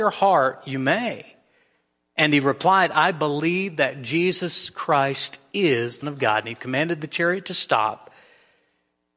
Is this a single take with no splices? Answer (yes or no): no